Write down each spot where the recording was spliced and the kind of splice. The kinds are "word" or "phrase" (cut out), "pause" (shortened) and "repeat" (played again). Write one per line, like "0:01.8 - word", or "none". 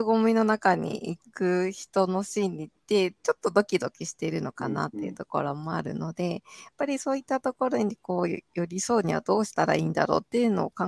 none